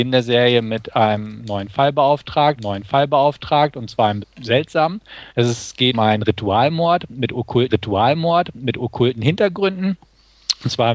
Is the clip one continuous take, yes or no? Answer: no